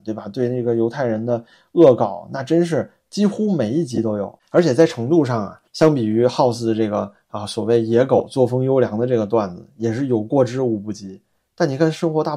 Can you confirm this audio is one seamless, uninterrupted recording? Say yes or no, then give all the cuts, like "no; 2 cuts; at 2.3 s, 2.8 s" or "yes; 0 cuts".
no; 1 cut; at 5.7 s